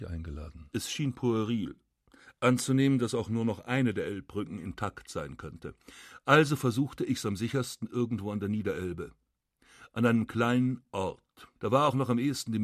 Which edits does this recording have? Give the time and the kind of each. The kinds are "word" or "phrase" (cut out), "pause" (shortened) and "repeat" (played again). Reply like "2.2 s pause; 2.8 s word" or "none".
11.6 s pause